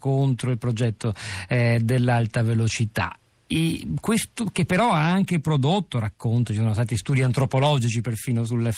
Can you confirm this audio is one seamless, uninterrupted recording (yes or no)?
yes